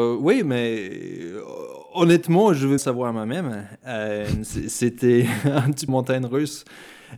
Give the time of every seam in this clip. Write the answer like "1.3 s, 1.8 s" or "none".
2.8 s, 5.9 s